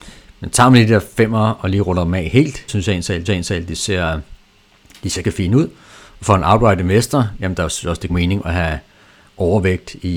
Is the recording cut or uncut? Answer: cut